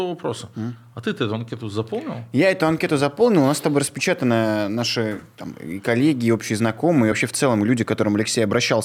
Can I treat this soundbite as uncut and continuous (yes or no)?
yes